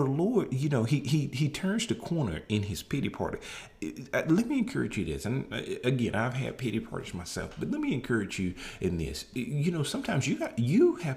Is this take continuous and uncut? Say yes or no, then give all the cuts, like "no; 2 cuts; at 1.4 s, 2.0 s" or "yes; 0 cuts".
yes; 0 cuts